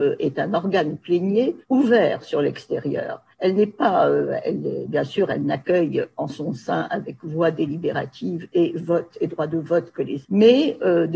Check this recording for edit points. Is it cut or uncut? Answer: cut